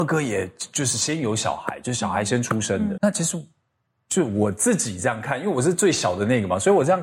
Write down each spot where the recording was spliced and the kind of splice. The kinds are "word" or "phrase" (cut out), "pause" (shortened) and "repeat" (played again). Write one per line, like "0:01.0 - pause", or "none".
0:03.0 - word